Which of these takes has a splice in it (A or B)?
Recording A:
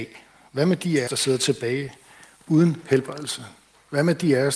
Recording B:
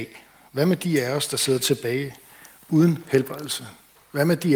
A